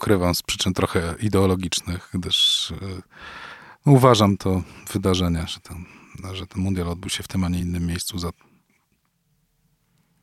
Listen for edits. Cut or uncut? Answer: uncut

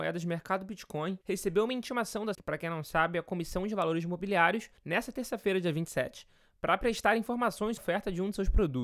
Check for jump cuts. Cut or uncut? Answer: cut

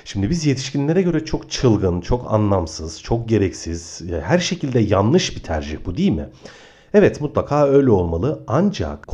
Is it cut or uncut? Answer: uncut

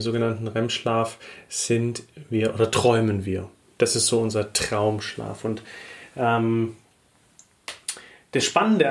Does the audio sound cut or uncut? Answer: uncut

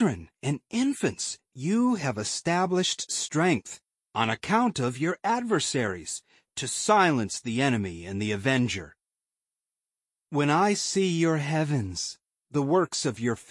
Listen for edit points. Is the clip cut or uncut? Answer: uncut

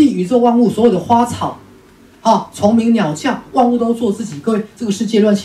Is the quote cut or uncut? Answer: uncut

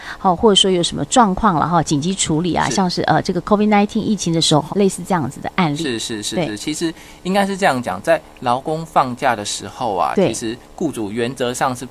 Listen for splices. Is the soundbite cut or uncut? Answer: cut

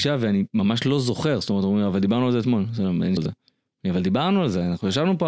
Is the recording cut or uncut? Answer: cut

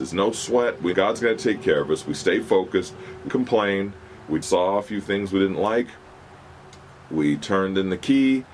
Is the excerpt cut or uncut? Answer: cut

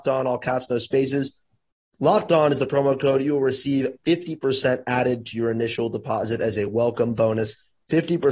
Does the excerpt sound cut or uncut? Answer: uncut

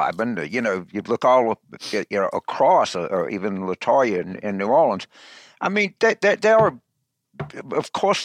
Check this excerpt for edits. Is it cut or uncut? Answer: uncut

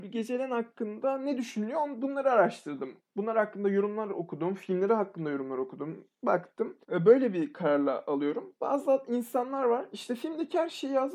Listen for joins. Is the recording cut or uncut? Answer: cut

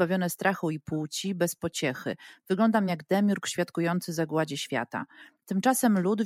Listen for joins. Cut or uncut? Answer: uncut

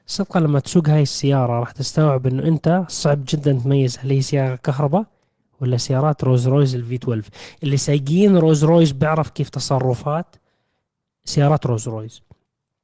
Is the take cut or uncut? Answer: uncut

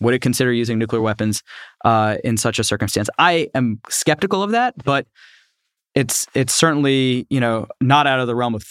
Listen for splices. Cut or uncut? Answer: uncut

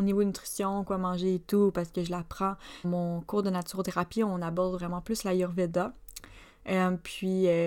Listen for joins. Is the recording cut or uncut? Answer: cut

